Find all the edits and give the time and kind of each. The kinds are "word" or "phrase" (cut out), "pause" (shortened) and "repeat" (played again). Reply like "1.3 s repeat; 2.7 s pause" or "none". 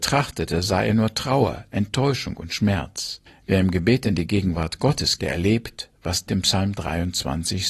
3.3 s pause; 5.2 s word; 6.3 s word